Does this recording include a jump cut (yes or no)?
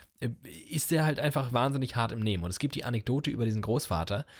yes